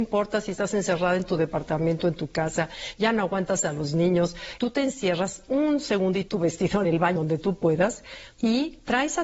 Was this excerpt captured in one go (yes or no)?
no